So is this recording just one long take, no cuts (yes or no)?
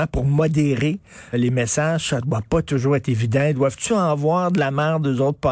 no